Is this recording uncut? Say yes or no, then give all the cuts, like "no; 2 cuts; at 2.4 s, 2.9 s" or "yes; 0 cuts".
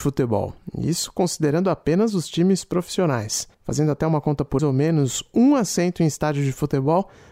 no; 2 cuts; at 3.5 s, 4.6 s